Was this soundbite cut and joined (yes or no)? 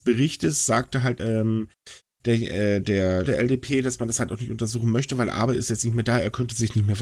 yes